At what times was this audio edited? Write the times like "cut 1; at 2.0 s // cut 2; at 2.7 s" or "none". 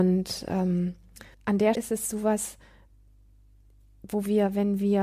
cut 1; at 1.3 s // cut 2; at 1.8 s